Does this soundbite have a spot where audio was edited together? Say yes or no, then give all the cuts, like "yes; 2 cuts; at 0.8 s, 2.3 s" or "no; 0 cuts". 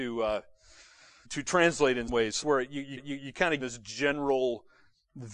yes; 5 cuts; at 1.2 s, 2.1 s, 2.4 s, 3.0 s, 3.6 s